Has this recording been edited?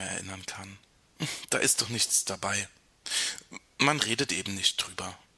no; 0 cuts

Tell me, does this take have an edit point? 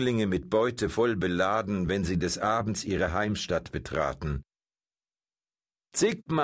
no; 0 cuts

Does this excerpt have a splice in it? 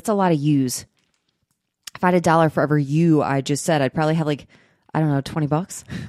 no; 0 cuts

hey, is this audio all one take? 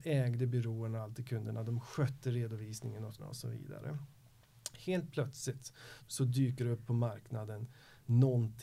no; 2 cuts; at 3.2 s, 6.0 s

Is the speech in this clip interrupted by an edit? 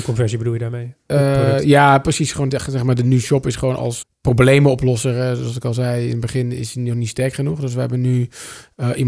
yes; 2 cuts; at 2.5 s, 4.0 s

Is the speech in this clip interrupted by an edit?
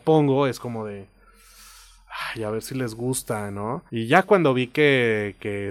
yes; 1 cut; at 3.9 s

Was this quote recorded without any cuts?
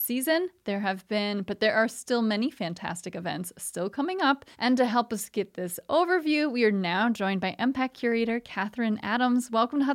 no; 1 cut; at 4.5 s

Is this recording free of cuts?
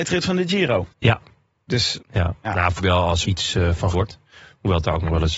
no; 5 cuts; at 0.9 s, 2.0 s, 2.8 s, 3.2 s, 3.9 s

